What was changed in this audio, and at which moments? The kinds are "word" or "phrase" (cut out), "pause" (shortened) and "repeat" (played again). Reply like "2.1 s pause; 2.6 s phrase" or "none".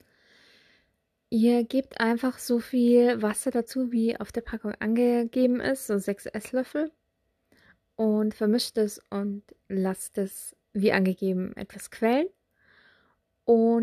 10.6 s pause